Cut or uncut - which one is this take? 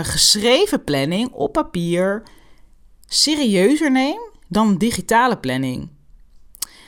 uncut